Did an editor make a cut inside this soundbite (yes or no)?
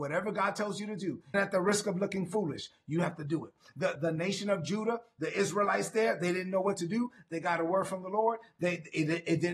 yes